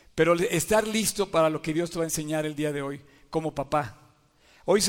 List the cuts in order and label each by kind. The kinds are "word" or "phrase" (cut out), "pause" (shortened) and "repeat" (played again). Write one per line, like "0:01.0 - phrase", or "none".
none